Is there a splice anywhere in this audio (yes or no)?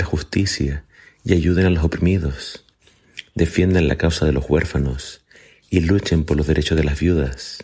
no